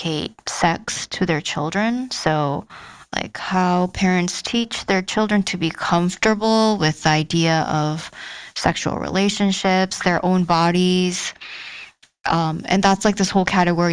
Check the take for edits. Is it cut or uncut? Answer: uncut